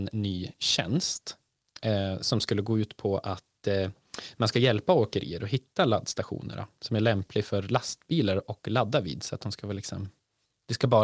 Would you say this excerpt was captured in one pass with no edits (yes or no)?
yes